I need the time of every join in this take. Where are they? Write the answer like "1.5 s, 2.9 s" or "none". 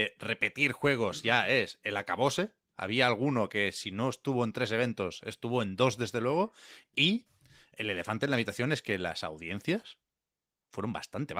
none